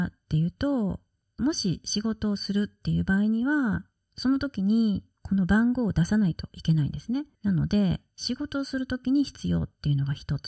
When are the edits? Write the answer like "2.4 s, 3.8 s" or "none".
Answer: 1.4 s, 7.3 s